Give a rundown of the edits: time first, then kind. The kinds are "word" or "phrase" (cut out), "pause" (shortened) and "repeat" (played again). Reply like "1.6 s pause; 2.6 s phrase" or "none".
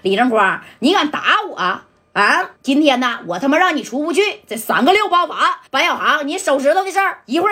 2.6 s pause; 5.7 s pause

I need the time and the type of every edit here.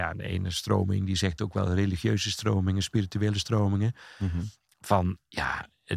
none

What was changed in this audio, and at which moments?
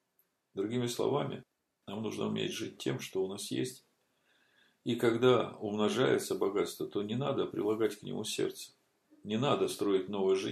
none

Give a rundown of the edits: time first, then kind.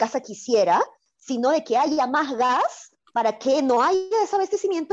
none

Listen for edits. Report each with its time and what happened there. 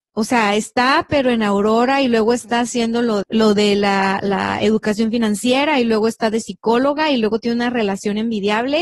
3.2 s word

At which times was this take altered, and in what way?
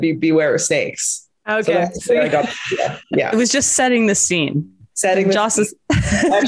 1.4 s pause; 3.0 s pause

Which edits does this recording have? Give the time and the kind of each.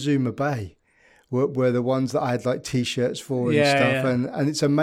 none

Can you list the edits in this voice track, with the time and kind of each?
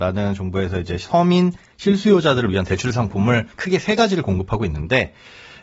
3.5 s pause

